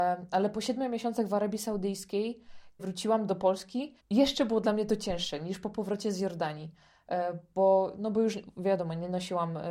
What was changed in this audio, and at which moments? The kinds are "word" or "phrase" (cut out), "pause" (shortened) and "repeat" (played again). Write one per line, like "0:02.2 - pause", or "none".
0:02.8 - word
0:04.0 - pause